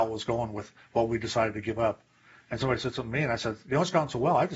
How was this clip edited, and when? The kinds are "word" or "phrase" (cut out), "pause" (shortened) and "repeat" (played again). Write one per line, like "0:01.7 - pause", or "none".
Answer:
none